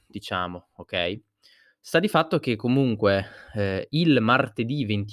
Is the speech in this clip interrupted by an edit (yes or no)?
no